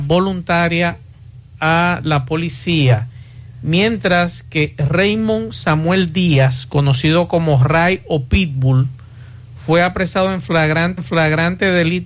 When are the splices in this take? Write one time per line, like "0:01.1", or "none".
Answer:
0:11.0